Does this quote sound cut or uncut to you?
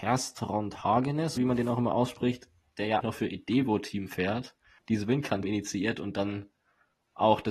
cut